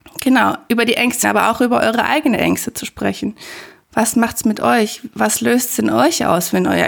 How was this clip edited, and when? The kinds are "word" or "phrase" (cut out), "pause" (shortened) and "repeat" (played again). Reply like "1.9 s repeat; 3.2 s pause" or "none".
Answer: 1.2 s word